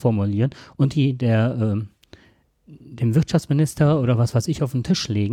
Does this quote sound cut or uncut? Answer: uncut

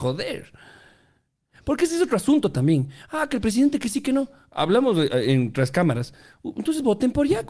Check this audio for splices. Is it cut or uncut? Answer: uncut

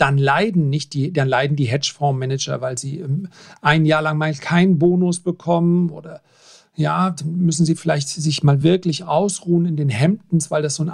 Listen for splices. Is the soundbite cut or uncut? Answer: uncut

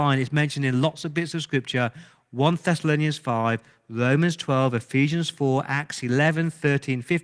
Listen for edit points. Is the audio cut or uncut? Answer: uncut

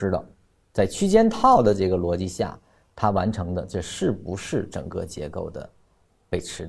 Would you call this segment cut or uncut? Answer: uncut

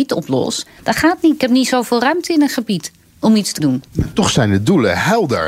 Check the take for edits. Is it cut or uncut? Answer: cut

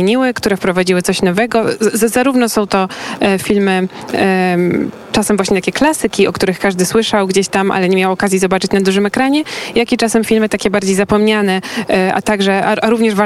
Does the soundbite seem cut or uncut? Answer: uncut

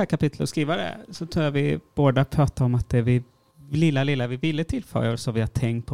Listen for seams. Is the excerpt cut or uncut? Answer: uncut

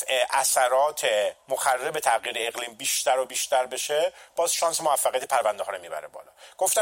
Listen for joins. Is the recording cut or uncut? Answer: cut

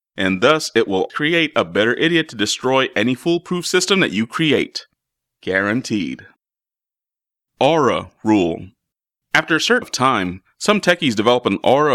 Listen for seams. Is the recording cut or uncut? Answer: cut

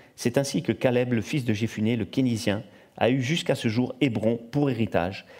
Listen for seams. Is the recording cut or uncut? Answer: uncut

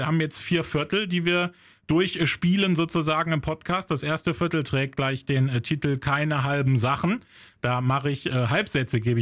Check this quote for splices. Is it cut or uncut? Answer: uncut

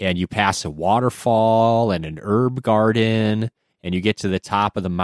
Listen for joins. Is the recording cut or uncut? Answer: uncut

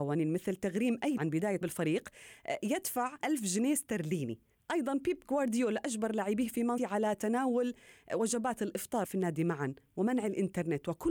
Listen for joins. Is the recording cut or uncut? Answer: cut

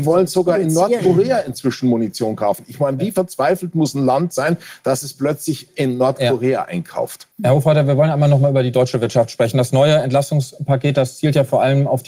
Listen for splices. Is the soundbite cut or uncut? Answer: cut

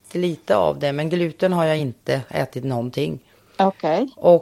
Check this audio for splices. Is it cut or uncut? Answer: uncut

